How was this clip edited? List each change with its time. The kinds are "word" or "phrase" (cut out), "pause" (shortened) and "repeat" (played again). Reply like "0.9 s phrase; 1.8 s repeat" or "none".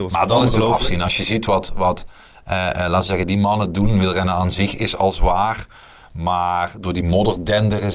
none